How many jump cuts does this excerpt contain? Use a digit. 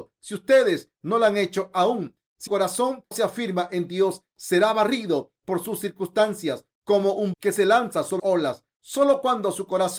4